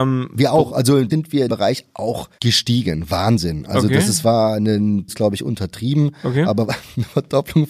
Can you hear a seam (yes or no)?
yes